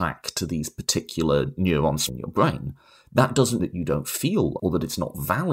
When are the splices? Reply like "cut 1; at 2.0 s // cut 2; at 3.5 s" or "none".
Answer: cut 1; at 2.1 s // cut 2; at 3.6 s // cut 3; at 4.6 s